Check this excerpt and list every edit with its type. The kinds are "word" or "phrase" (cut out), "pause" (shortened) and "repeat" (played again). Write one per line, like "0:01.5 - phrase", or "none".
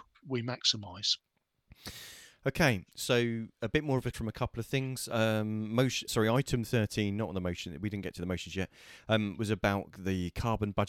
0:04.1 - phrase
0:06.1 - word